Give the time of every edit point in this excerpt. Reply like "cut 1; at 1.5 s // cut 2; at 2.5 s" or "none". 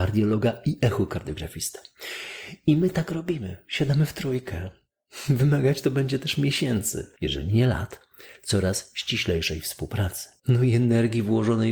cut 1; at 7.2 s // cut 2; at 10.4 s